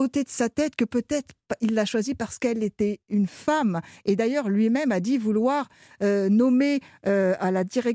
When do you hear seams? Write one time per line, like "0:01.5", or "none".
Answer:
none